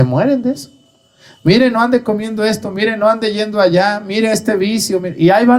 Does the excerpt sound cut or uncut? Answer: uncut